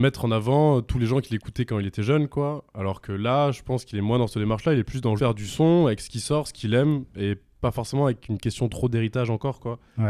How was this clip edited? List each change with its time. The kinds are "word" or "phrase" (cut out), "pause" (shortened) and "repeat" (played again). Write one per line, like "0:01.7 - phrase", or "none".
0:05.2 - word